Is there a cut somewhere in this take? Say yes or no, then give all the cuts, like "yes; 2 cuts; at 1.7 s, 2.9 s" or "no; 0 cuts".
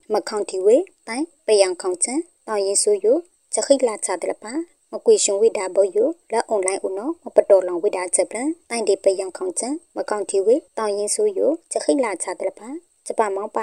no; 0 cuts